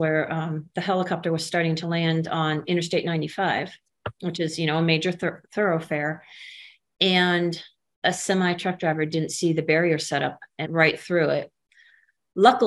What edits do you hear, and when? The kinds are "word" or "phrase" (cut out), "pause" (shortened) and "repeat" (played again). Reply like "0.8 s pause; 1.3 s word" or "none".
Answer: 10.6 s word